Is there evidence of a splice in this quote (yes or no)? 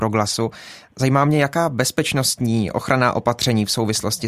no